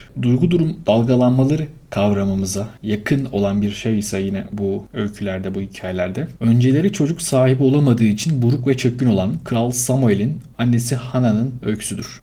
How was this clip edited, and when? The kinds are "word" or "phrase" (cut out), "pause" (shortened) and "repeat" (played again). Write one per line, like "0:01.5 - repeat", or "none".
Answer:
0:10.5 - pause

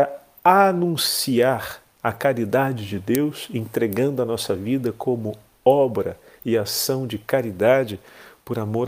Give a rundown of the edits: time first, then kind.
none

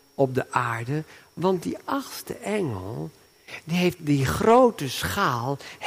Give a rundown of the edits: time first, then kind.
0:04.0 - word

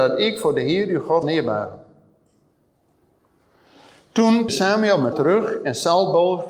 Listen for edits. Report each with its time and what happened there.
0:01.2 - word
0:04.5 - word
0:05.1 - word

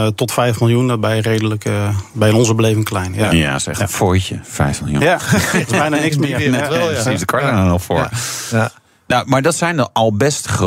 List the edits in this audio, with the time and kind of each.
none

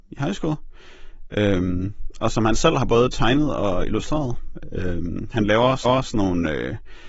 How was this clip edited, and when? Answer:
0:05.8 - repeat

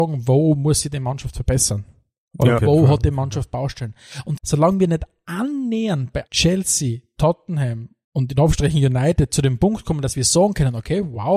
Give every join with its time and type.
0:02.6 - word
0:04.4 - word
0:06.3 - word
0:08.0 - pause

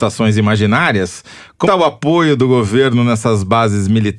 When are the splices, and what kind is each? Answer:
0:01.7 - word

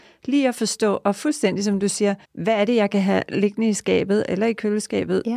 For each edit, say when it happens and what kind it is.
0:02.2 - pause

